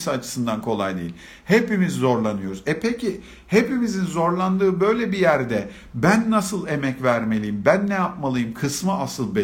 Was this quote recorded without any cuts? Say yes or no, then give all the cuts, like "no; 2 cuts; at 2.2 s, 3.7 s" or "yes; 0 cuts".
yes; 0 cuts